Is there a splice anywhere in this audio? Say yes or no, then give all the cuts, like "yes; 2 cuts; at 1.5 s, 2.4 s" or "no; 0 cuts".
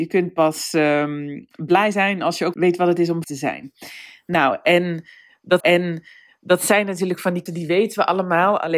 yes; 4 cuts; at 2.5 s, 3.2 s, 5.6 s, 7.5 s